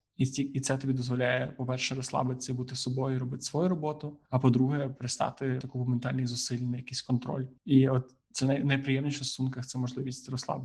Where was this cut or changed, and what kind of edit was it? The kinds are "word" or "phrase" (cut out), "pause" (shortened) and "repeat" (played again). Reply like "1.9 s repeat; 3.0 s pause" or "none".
4.3 s pause; 5.6 s word; 7.6 s pause